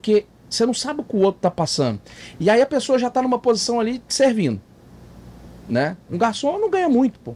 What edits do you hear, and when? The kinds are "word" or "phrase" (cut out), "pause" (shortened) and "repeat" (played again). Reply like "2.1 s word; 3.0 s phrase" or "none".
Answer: none